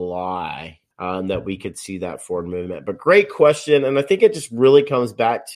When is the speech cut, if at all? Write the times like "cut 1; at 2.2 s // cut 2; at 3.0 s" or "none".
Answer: cut 1; at 0.9 s